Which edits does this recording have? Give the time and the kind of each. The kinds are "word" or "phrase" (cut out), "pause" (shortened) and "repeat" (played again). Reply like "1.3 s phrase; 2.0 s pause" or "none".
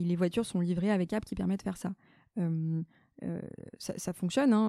1.1 s word